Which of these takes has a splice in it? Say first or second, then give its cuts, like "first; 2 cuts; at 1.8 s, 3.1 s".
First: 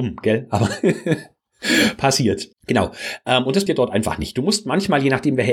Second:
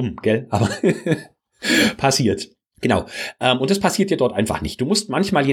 first; 2 cuts; at 2.5 s, 3.7 s